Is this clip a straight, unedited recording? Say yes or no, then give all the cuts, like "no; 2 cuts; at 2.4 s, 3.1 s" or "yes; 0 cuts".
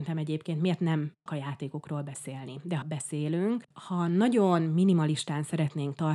no; 3 cuts; at 1.3 s, 2.8 s, 3.7 s